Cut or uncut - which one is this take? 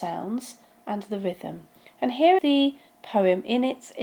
cut